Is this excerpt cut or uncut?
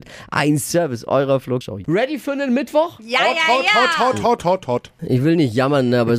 cut